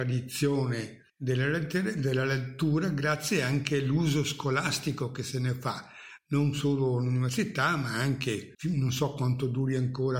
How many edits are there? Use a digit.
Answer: 2